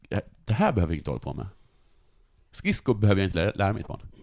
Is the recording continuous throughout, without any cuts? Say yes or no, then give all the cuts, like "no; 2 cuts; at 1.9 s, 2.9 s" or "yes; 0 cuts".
yes; 0 cuts